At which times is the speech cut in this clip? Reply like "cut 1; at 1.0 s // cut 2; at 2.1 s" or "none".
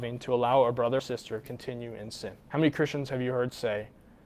cut 1; at 1.0 s // cut 2; at 1.4 s // cut 3; at 2.4 s